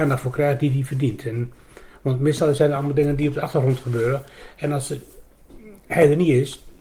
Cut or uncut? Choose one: uncut